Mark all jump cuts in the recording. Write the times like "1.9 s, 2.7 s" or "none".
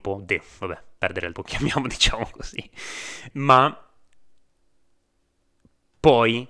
1.3 s, 3.3 s